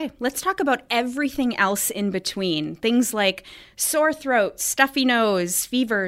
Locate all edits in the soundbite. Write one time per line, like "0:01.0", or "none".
none